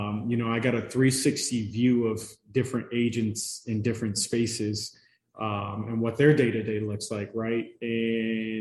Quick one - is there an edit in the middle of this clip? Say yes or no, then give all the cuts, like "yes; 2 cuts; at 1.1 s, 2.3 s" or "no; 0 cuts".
no; 0 cuts